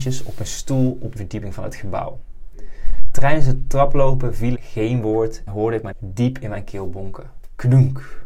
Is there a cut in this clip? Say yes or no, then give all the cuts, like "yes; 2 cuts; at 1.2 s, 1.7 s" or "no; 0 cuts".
yes; 4 cuts; at 1.2 s, 4.5 s, 5.5 s, 5.9 s